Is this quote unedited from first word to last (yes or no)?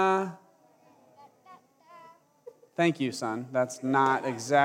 yes